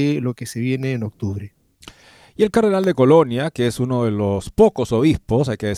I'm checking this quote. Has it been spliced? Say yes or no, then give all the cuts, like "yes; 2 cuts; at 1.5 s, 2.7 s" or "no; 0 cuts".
no; 0 cuts